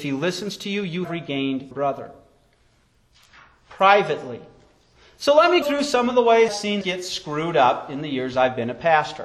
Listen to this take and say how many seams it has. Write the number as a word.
five